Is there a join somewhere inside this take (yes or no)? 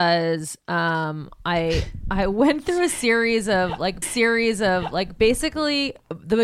yes